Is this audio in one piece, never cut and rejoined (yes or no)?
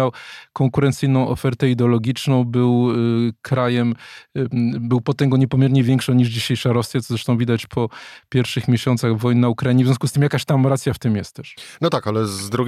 yes